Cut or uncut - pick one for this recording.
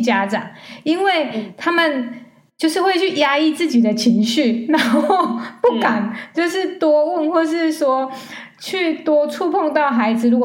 uncut